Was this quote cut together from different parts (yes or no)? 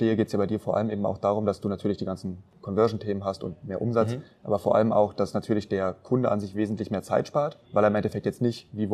yes